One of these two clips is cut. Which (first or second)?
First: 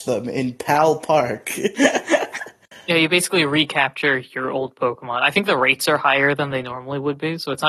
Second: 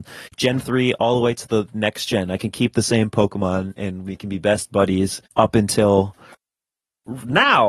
second